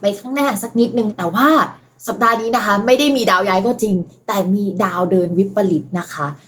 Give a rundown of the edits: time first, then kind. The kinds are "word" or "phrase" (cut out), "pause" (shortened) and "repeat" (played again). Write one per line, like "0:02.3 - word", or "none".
none